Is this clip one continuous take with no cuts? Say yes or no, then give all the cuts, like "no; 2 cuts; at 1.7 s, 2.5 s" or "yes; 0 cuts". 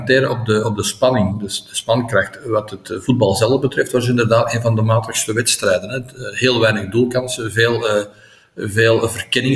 yes; 0 cuts